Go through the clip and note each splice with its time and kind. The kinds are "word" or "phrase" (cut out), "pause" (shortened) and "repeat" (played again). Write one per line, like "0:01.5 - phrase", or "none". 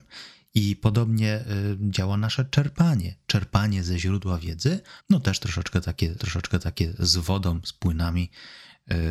0:05.0 - pause
0:06.2 - repeat